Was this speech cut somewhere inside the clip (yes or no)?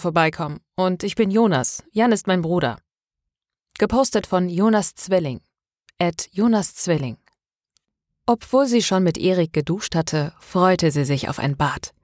no